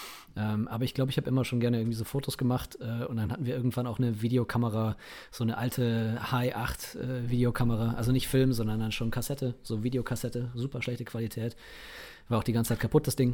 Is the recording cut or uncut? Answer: uncut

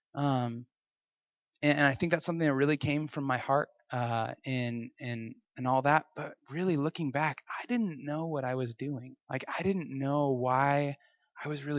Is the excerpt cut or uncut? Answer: cut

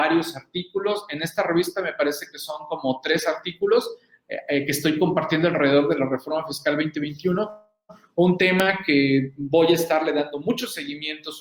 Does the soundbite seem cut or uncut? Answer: uncut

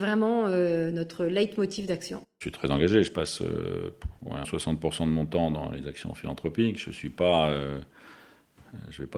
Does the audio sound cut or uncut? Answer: cut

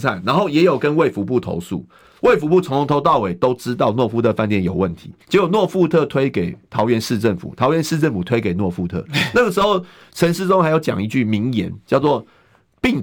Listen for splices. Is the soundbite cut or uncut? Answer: cut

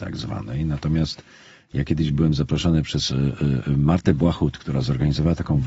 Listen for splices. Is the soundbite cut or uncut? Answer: uncut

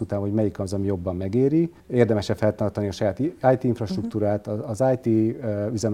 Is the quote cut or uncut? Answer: cut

